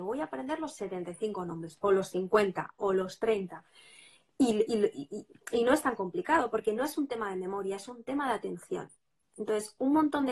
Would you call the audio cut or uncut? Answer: uncut